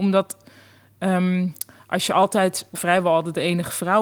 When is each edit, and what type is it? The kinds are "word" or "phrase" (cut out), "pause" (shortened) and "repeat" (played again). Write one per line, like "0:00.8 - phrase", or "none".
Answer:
0:02.7 - word